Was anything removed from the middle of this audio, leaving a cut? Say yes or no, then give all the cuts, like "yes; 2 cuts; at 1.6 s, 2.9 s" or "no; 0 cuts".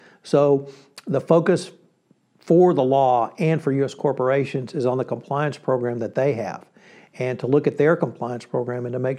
no; 0 cuts